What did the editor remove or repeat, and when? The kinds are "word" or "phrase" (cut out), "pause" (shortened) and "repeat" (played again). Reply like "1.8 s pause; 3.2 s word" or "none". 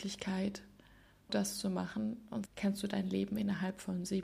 1.3 s word; 2.5 s word